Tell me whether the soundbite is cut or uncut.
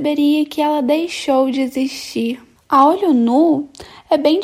uncut